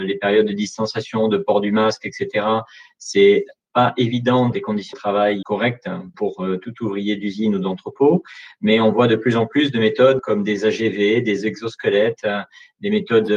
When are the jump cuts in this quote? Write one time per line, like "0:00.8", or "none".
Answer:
0:04.5
0:04.9
0:05.4
0:06.1
0:10.2